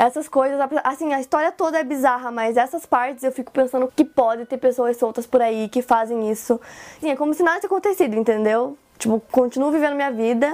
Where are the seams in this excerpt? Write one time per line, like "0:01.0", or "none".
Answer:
0:03.9
0:07.0
0:07.6